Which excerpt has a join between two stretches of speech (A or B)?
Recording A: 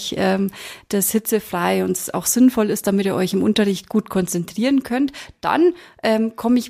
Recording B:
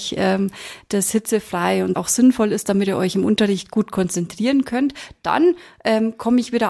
B